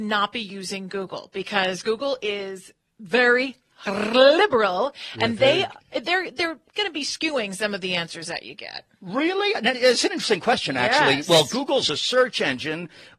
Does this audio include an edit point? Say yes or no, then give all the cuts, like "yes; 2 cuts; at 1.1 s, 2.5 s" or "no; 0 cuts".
yes; 1 cut; at 9.7 s